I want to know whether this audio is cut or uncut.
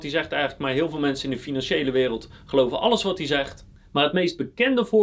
uncut